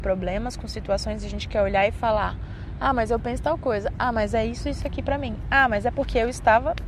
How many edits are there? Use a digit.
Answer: 0